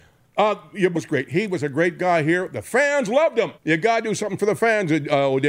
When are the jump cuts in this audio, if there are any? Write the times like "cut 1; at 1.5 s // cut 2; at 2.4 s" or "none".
cut 1; at 0.9 s // cut 2; at 3.6 s